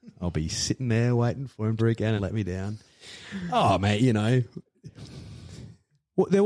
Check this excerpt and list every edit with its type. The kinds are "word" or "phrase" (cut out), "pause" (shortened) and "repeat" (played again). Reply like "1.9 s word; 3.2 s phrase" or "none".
1.8 s phrase; 2.2 s word